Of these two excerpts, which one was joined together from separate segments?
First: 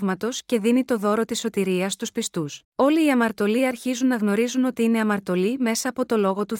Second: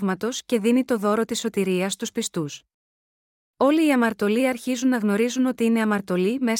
first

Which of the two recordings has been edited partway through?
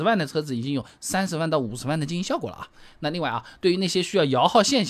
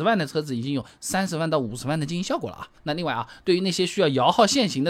second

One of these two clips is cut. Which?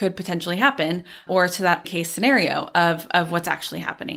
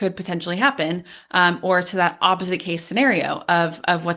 first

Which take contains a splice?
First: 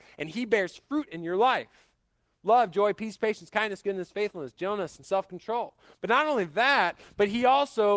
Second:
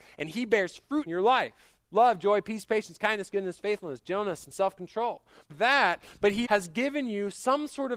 second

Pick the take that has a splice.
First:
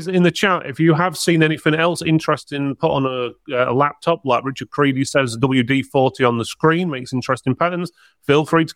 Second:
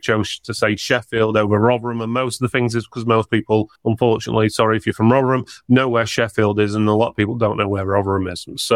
second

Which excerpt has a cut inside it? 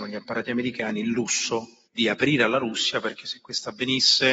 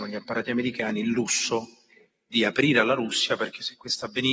first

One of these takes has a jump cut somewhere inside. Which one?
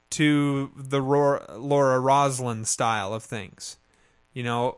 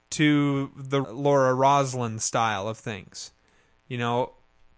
second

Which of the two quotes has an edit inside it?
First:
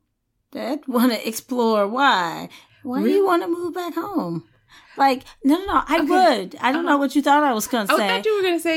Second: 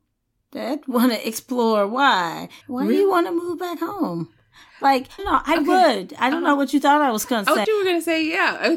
second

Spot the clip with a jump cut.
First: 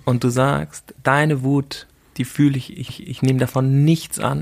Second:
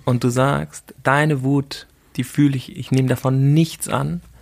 first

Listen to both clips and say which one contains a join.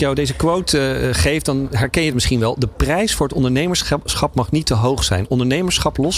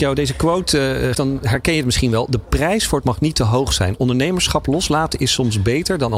second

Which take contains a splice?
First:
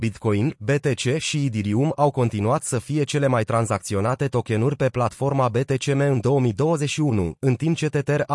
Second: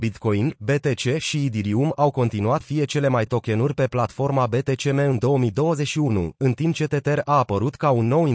second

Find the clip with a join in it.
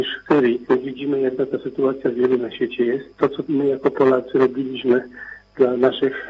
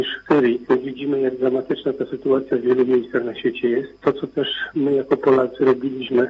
first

